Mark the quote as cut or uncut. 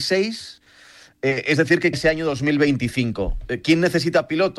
cut